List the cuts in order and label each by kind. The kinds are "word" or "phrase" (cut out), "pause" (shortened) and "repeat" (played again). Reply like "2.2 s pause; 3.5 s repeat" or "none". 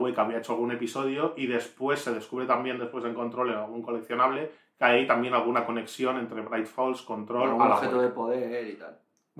none